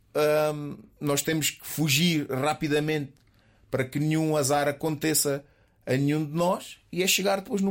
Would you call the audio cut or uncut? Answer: uncut